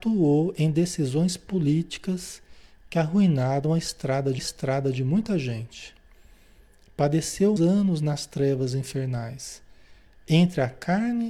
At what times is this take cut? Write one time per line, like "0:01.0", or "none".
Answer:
0:04.4
0:07.6